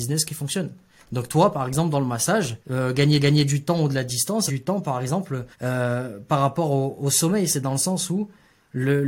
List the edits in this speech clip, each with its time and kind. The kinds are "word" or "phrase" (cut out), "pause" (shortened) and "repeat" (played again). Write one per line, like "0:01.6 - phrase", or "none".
0:02.6 - pause
0:03.2 - repeat
0:04.5 - phrase
0:05.5 - pause